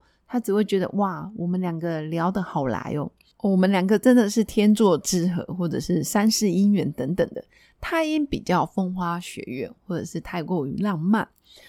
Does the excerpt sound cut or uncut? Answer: uncut